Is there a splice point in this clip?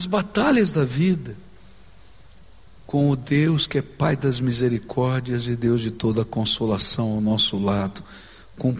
no; 0 cuts

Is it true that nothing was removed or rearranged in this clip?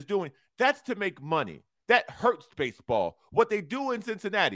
yes; 0 cuts

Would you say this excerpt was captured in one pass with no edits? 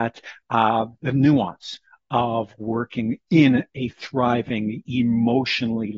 yes; 0 cuts

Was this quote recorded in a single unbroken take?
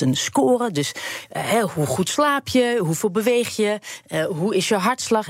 yes; 0 cuts

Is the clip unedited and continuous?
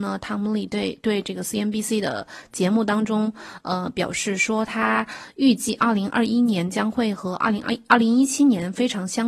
yes; 0 cuts

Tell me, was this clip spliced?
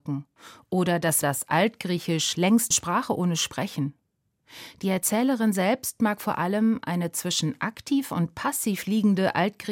yes; 2 cuts; at 1.2 s, 2.7 s

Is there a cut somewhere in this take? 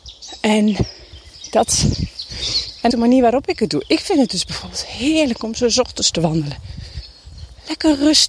yes; 1 cut; at 2.9 s

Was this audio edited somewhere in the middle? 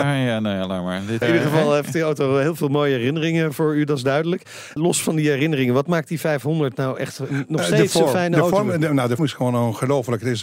yes; 2 cuts; at 1.2 s, 9.2 s

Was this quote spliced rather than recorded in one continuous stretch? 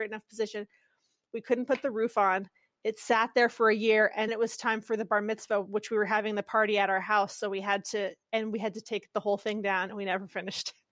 yes; 2 cuts; at 4.3 s, 8.2 s

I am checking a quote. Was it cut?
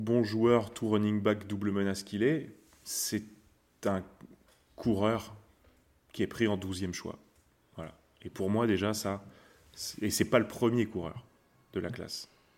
no; 0 cuts

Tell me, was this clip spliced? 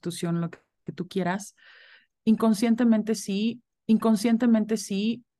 yes; 1 cut; at 3.7 s

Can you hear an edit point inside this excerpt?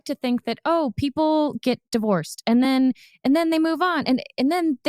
no; 0 cuts

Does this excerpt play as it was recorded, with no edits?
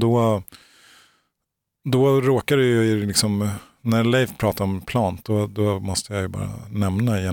yes; 0 cuts

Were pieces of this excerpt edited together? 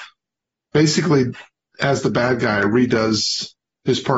no; 0 cuts

